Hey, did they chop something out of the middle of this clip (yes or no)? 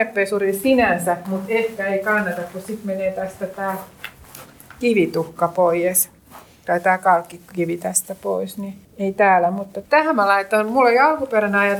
yes